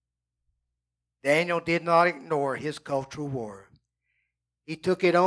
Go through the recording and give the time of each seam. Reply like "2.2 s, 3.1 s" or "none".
none